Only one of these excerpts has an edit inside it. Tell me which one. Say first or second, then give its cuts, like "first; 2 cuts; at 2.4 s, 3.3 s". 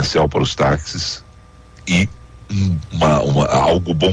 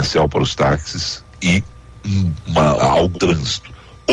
second; 3 cuts; at 1.3 s, 2.8 s, 3.1 s